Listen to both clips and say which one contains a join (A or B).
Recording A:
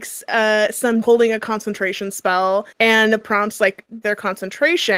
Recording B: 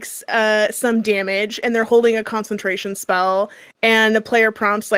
A